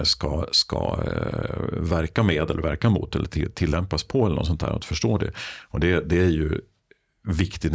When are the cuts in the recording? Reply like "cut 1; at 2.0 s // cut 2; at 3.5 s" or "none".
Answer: none